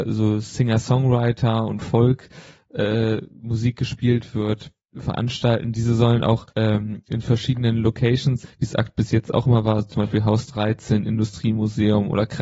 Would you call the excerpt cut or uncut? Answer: cut